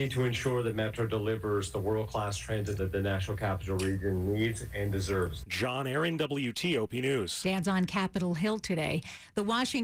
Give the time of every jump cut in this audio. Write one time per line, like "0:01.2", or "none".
0:02.8
0:07.6